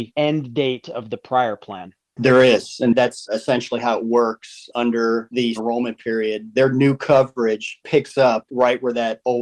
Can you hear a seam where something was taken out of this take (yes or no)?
yes